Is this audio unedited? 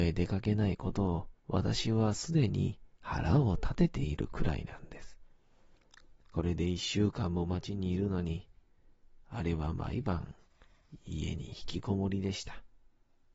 no; 3 cuts; at 1.4 s, 3.0 s, 6.2 s

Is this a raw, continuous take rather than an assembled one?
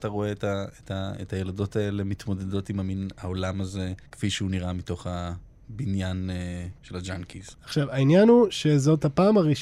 no; 3 cuts; at 4.0 s, 6.8 s, 7.5 s

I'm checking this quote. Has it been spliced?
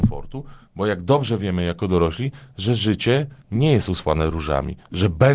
yes; 1 cut; at 3.4 s

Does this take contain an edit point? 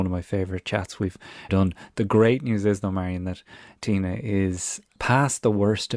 yes; 1 cut; at 1.5 s

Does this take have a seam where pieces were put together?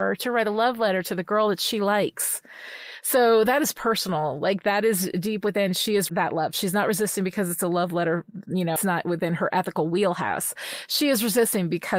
yes; 2 cuts; at 6.1 s, 8.8 s

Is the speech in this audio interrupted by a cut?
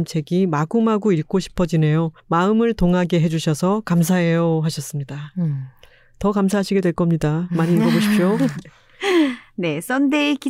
yes; 1 cut; at 2.2 s

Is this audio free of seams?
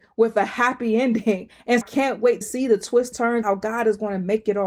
no; 4 cuts; at 1.8 s, 2.4 s, 3.1 s, 3.4 s

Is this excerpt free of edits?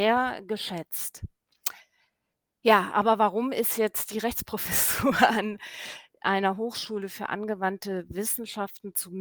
yes; 0 cuts

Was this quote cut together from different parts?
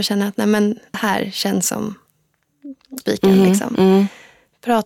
yes; 2 cuts; at 0.9 s, 3.0 s

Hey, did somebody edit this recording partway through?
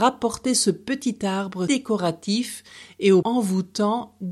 yes; 2 cuts; at 1.7 s, 3.2 s

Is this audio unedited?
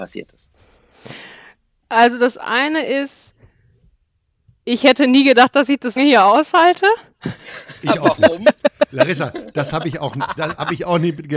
no; 2 cuts; at 6.0 s, 7.8 s

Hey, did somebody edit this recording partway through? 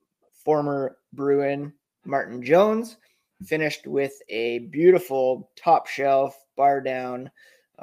no; 0 cuts

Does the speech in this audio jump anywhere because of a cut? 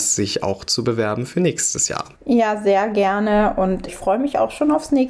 yes; 2 cuts; at 2.1 s, 3.9 s

